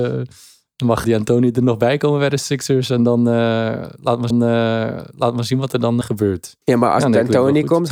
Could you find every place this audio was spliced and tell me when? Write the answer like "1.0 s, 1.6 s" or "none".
1.0 s, 4.3 s, 6.0 s, 6.6 s